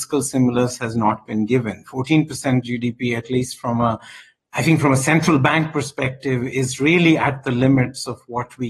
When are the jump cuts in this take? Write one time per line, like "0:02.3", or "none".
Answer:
none